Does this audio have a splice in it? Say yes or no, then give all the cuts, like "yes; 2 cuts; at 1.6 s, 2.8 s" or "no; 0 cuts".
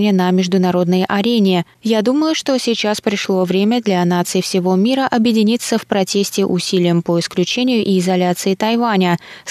no; 0 cuts